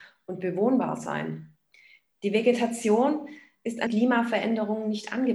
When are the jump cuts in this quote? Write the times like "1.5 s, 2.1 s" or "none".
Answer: 3.9 s